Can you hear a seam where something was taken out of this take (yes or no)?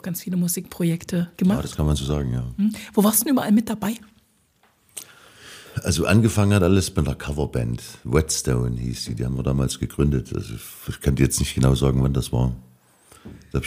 yes